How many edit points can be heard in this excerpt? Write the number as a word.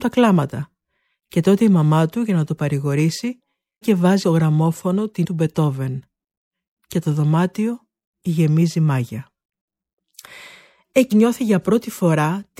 four